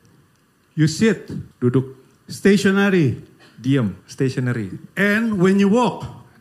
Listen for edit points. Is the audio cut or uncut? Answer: cut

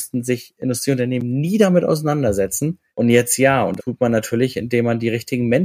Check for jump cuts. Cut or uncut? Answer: cut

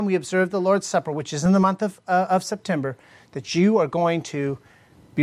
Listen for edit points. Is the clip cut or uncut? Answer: uncut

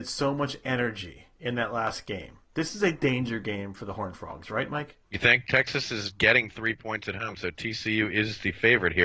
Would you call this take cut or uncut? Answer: cut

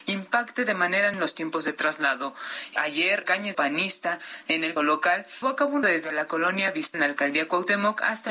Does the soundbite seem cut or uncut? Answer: cut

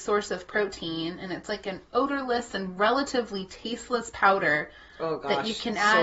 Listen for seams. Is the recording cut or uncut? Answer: uncut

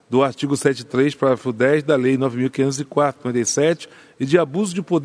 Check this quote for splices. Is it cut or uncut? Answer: uncut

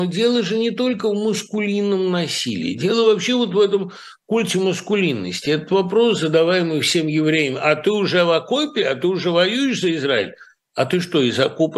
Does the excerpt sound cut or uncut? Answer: uncut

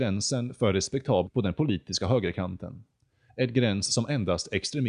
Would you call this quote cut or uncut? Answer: cut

